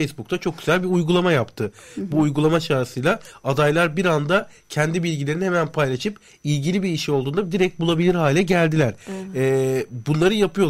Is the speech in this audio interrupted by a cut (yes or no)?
no